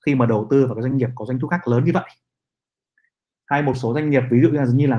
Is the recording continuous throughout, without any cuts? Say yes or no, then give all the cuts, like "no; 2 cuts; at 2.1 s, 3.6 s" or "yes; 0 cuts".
yes; 0 cuts